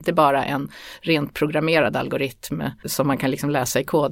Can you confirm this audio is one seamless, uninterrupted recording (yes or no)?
no